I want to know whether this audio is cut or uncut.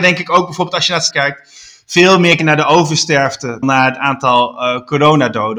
cut